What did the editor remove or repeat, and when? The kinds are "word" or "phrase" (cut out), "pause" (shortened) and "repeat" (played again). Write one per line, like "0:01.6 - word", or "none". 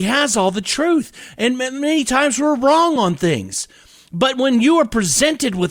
none